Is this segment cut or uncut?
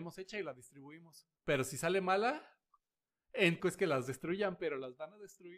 cut